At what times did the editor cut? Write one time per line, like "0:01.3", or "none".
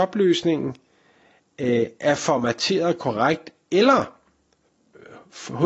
none